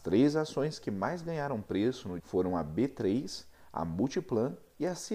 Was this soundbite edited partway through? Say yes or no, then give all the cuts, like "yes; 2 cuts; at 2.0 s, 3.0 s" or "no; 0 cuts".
yes; 1 cut; at 2.2 s